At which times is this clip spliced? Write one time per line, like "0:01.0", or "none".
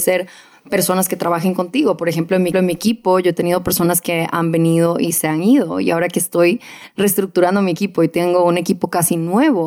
0:02.5